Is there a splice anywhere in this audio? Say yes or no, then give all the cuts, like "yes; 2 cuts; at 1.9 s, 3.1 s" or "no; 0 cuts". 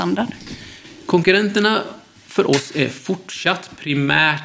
no; 0 cuts